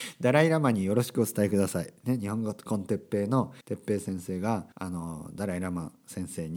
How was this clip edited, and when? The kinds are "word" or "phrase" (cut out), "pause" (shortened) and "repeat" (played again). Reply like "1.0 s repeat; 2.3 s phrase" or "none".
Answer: 3.6 s pause; 4.7 s pause

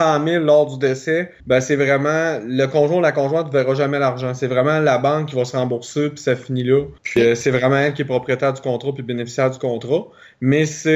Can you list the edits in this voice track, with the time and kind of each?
1.4 s pause; 7.0 s pause

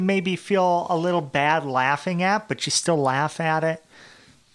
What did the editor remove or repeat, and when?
none

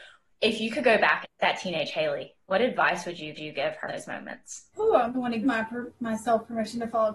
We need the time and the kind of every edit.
1.2 s phrase; 2.4 s pause; 3.4 s repeat; 3.9 s word; 4.7 s pause; 5.1 s word; 5.4 s word

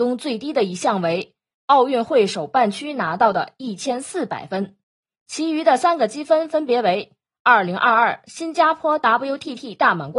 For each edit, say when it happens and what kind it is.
none

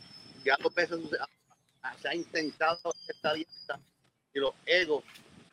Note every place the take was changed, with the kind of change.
none

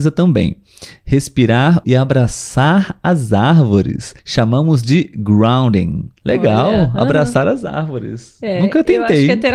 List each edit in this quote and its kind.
1.8 s phrase; 4.2 s pause; 6.2 s pause

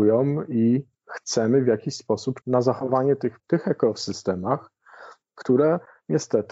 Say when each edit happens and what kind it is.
0.9 s pause; 2.4 s phrase; 3.4 s phrase

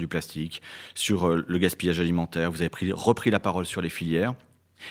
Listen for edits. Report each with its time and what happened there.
none

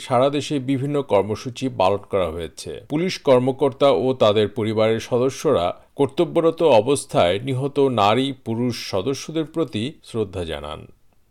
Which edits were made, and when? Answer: 2.8 s pause; 10.0 s pause

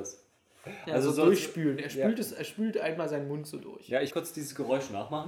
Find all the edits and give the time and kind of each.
4.1 s word

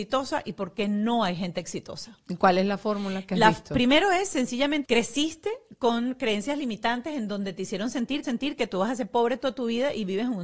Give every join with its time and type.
4.8 s phrase; 8.2 s repeat

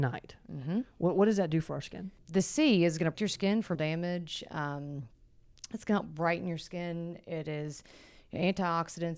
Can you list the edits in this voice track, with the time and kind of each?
2.2 s word; 3.1 s word; 3.7 s word

